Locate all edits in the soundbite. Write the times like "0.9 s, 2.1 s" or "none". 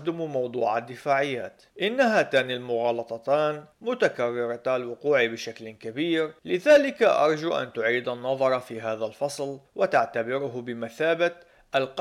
1.7 s, 3.7 s, 6.4 s, 9.7 s